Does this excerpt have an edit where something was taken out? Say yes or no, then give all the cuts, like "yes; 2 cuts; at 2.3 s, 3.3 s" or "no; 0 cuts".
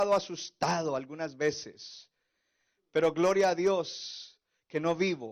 no; 0 cuts